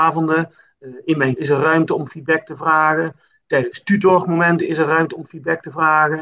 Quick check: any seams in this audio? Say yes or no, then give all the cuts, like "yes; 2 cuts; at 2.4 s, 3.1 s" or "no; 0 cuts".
yes; 1 cut; at 1.4 s